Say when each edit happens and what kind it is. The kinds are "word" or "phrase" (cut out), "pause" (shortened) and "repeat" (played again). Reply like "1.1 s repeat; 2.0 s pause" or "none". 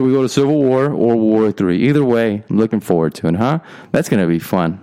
none